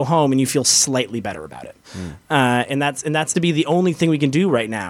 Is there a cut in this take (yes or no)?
yes